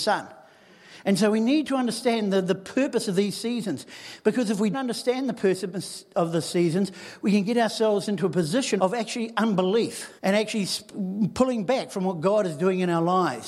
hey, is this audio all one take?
no; 3 cuts; at 4.7 s, 8.8 s, 10.2 s

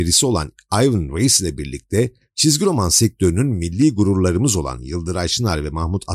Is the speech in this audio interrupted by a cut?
no; 0 cuts

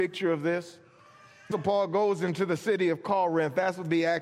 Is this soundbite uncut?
no; 1 cut; at 1.5 s

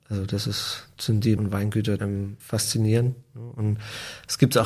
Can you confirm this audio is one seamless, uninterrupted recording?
no; 3 cuts; at 1.4 s, 2.0 s, 2.4 s

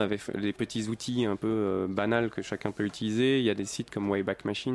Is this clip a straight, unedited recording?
yes; 0 cuts

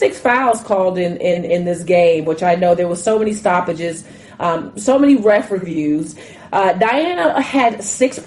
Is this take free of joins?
yes; 0 cuts

